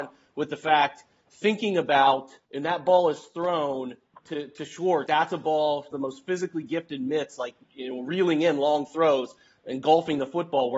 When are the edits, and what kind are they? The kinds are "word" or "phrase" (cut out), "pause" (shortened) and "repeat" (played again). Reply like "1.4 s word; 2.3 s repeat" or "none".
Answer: 2.4 s pause; 4.1 s pause; 5.1 s word; 5.9 s phrase; 7.6 s pause